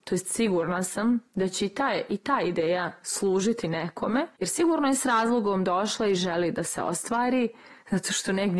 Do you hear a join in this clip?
yes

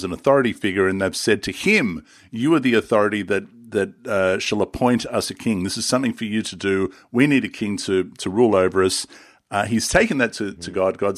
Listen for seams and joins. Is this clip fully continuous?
yes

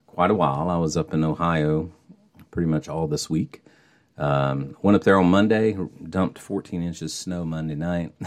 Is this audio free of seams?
yes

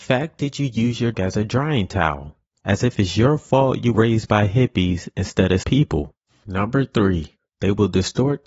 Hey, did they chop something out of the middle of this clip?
yes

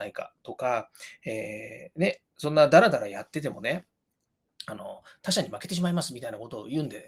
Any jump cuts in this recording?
no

